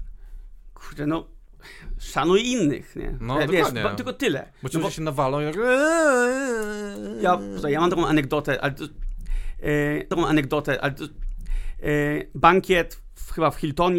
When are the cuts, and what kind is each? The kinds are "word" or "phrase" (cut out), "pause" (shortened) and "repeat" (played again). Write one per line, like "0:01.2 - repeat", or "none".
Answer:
0:10.1 - repeat